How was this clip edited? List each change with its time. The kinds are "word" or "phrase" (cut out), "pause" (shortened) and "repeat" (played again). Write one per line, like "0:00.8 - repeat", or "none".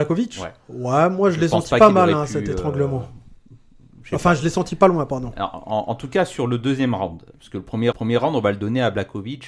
0:07.9 - repeat